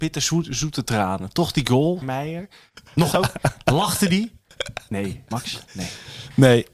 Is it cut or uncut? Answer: cut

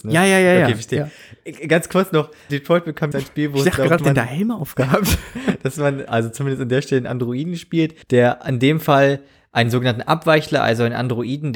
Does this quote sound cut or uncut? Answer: cut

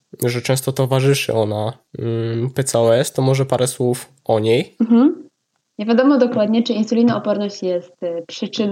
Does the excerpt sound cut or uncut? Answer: uncut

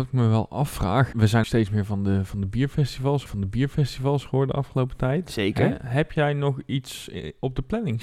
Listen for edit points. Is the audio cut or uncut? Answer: cut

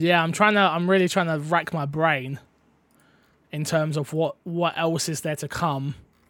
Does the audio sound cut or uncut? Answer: uncut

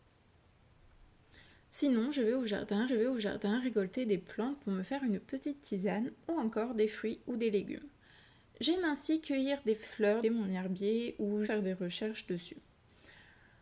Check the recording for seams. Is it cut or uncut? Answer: cut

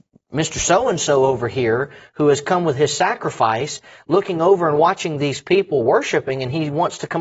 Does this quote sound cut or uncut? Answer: uncut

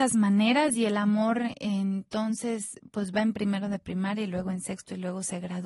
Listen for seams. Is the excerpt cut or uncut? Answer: uncut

